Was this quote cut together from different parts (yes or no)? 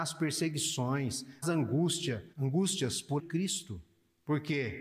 yes